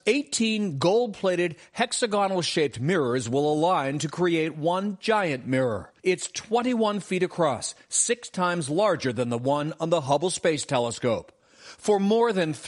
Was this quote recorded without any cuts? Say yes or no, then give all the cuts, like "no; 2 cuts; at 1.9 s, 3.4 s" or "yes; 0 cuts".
no; 1 cut; at 6.0 s